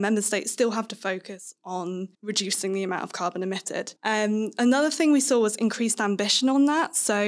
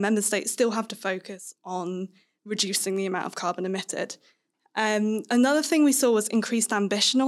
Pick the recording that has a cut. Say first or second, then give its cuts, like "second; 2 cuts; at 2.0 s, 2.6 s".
first; 2 cuts; at 2.1 s, 4.0 s